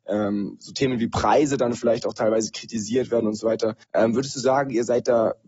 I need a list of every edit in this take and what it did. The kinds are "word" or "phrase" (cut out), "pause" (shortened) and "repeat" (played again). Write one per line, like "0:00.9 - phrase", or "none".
0:03.8 - pause